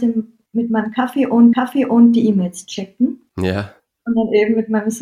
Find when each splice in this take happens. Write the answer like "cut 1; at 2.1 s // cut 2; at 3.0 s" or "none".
cut 1; at 1.5 s // cut 2; at 3.8 s